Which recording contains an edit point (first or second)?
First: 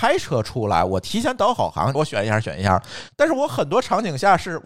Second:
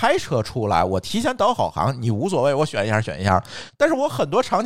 first